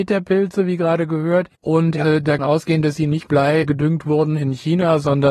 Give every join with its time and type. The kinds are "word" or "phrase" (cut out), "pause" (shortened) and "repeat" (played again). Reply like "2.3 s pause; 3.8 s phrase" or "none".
1.5 s pause; 2.4 s phrase; 3.3 s word; 3.6 s word